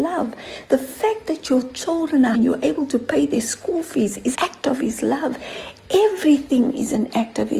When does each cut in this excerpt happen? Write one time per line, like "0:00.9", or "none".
0:02.3
0:04.3